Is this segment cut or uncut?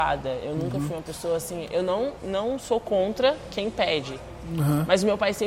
uncut